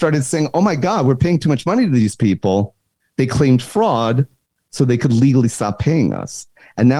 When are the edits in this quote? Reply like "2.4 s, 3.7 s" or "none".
none